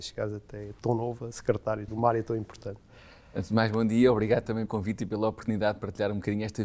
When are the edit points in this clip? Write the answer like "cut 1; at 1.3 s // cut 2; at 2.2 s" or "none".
cut 1; at 1.9 s // cut 2; at 4.7 s